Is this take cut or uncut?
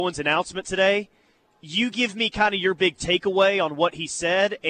uncut